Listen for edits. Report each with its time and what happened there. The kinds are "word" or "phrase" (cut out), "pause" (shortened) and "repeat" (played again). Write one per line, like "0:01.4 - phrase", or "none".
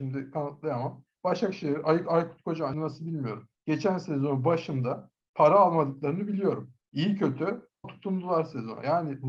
0:02.7 - word
0:03.6 - pause
0:05.2 - pause
0:06.8 - pause
0:07.8 - word